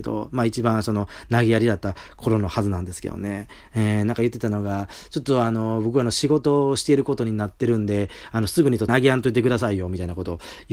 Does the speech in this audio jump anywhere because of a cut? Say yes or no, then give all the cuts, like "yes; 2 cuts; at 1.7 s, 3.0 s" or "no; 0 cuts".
yes; 1 cut; at 8.9 s